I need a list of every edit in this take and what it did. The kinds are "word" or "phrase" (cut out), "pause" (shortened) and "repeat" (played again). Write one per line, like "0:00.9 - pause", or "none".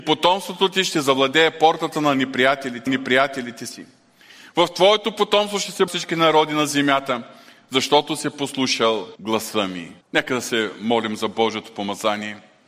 0:02.9 - repeat
0:05.9 - word
0:09.2 - pause
0:10.0 - pause